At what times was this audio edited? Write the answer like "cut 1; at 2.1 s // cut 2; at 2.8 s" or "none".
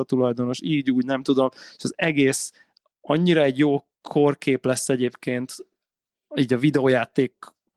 none